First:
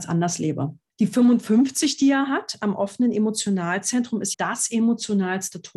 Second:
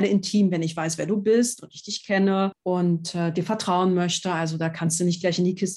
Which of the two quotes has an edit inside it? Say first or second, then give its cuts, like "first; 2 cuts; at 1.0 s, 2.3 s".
first; 1 cut; at 4.3 s